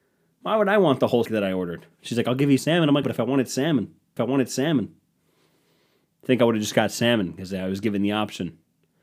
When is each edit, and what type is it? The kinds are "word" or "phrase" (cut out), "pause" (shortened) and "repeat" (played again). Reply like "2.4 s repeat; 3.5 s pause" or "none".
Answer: 1.2 s word; 2.6 s word; 3.0 s phrase; 4.2 s repeat